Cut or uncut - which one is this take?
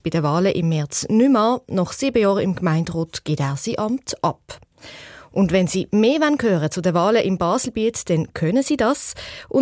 uncut